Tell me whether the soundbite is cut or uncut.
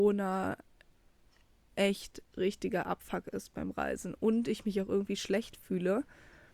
uncut